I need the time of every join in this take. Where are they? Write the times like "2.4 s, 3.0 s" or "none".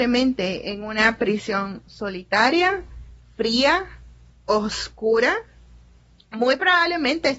none